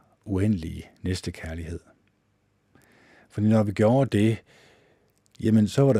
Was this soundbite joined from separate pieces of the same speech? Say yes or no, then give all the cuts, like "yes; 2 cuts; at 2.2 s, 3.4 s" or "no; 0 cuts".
no; 0 cuts